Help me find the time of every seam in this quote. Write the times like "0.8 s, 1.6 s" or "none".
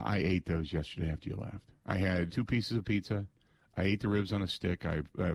2.3 s